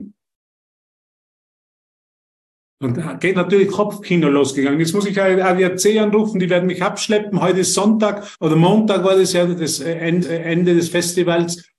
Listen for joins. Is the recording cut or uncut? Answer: cut